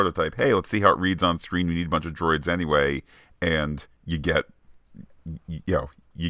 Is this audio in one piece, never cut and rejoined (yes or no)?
yes